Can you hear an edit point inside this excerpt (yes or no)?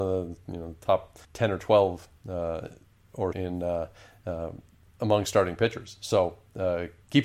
yes